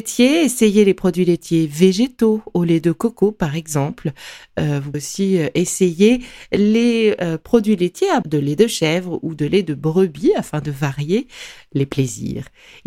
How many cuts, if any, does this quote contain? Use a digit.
2